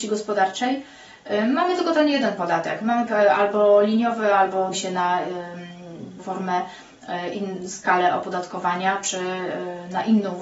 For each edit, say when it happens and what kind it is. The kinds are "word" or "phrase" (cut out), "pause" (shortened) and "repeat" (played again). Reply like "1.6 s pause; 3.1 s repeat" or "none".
3.1 s word; 4.7 s word; 6.2 s word